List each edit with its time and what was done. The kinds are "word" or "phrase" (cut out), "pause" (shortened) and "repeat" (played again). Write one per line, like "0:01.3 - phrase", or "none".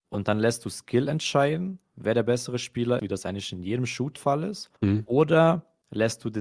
0:03.0 - word
0:04.2 - word
0:04.8 - pause